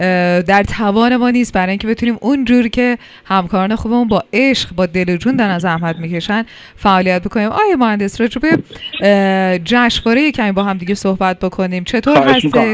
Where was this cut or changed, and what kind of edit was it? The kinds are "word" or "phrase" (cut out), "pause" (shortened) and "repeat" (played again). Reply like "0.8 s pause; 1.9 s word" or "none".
none